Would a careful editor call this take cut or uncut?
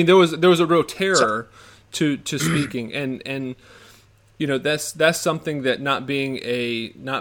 uncut